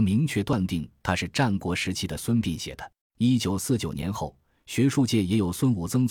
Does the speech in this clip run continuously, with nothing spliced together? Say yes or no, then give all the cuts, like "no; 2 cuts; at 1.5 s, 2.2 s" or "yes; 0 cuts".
no; 1 cut; at 3.0 s